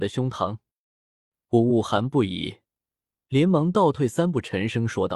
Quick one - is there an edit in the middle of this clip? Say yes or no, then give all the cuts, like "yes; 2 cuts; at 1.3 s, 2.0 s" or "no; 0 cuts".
no; 0 cuts